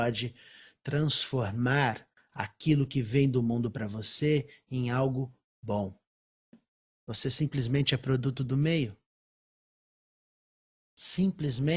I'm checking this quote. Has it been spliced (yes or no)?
no